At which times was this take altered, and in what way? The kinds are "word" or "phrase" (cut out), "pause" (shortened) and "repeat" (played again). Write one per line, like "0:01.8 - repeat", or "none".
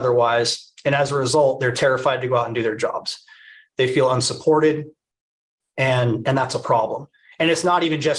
none